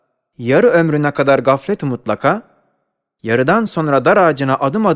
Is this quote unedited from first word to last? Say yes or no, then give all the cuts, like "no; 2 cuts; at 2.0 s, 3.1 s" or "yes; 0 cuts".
yes; 0 cuts